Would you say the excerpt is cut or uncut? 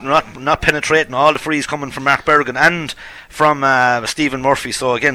uncut